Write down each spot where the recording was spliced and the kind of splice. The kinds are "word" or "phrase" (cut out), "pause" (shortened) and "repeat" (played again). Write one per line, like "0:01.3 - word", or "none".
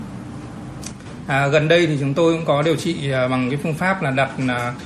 none